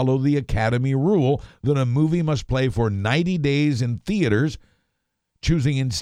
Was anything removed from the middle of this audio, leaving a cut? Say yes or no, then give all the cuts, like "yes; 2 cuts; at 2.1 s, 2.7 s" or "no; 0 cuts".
no; 0 cuts